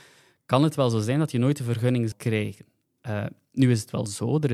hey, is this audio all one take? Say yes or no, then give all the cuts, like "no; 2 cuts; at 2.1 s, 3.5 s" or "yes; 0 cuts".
no; 1 cut; at 2.1 s